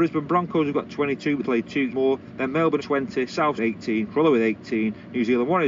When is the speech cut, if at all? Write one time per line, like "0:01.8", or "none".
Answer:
0:01.4
0:01.9
0:02.8
0:03.6

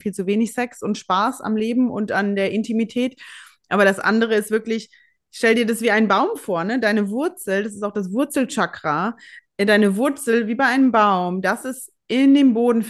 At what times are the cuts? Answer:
none

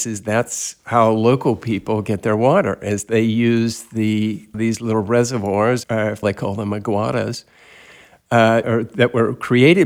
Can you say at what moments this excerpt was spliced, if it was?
0:04.5
0:05.8
0:06.2
0:08.6

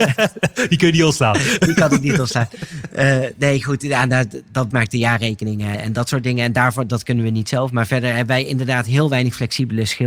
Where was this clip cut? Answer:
0:04.7
0:05.7

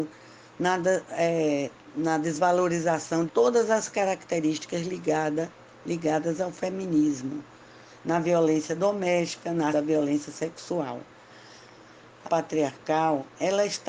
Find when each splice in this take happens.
0:03.3
0:09.7
0:12.2

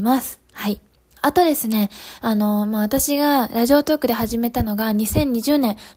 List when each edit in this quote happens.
0:01.0

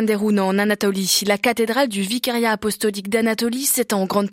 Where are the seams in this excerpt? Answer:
none

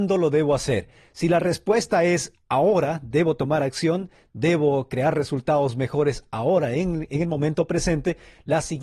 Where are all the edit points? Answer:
none

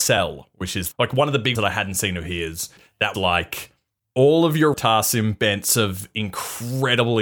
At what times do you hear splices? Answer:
0:00.9
0:01.5
0:02.8
0:03.1
0:04.7

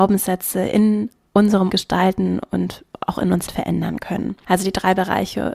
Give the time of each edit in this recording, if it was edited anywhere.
0:01.7
0:03.5

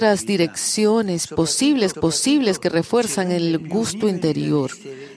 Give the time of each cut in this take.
0:01.9

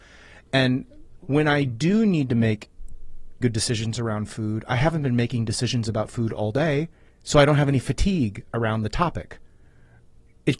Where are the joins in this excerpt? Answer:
0:03.4
0:07.1

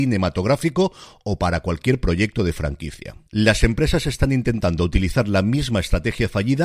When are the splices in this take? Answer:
0:03.2

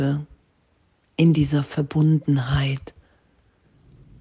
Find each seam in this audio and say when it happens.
none

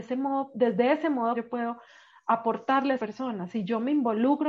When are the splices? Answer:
0:01.3
0:03.0

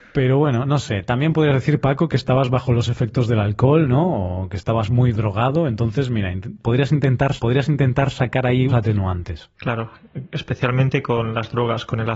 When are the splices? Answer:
0:07.4
0:08.7
0:09.5

